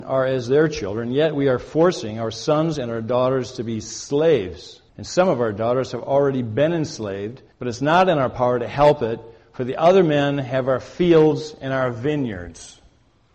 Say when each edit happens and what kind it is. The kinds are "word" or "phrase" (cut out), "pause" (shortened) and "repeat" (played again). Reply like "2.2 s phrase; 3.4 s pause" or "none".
4.9 s pause; 7.5 s pause